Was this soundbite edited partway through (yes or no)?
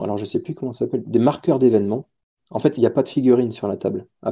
yes